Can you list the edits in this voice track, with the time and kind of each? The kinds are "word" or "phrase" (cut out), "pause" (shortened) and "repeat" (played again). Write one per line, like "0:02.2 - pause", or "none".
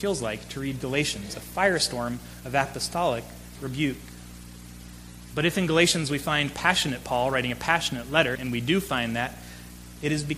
0:08.3 - word